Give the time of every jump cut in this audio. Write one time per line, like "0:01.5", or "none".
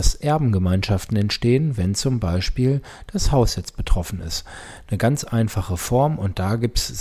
none